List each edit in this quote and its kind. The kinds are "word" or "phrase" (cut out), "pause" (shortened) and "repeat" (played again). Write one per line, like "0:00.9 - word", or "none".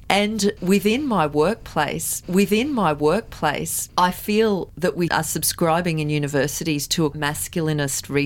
0:02.2 - repeat
0:05.1 - word
0:07.1 - word